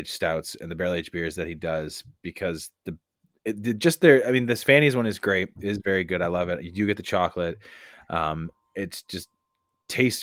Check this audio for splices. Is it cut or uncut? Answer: uncut